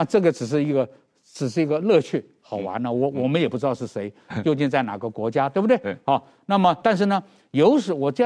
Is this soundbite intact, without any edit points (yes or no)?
no